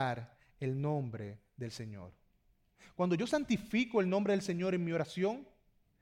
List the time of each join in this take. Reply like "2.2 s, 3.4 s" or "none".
none